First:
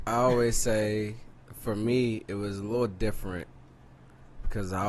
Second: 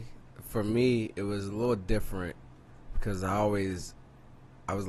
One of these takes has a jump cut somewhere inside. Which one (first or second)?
second